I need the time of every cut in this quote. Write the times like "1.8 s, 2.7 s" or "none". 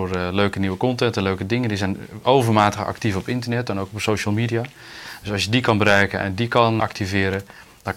6.8 s